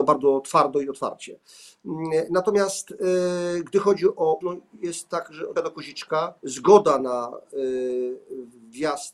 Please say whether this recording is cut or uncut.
cut